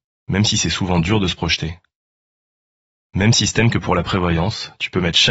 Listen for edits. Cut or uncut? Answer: uncut